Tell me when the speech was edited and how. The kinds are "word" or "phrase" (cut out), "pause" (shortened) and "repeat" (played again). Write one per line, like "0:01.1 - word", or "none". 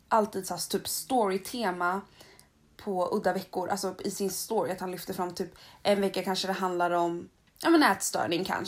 none